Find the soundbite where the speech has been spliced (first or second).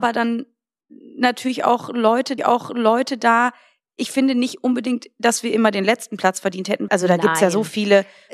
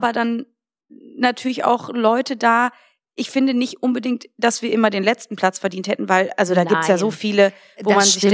first